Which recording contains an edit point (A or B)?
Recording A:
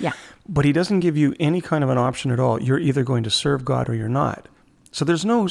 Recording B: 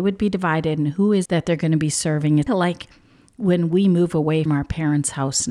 B